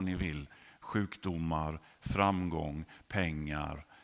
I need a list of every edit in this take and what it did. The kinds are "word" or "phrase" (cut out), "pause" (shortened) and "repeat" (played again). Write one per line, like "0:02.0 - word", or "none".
none